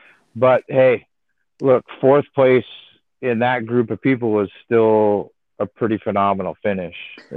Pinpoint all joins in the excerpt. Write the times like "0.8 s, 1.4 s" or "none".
none

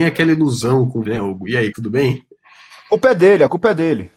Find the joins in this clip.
1.1 s, 1.7 s

